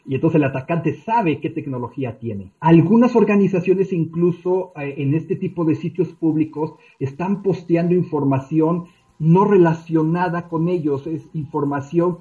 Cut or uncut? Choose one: uncut